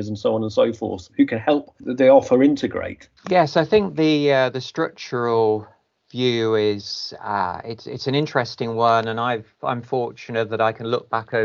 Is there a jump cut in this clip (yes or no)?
no